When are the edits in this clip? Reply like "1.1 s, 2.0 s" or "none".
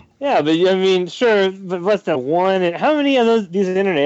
2.1 s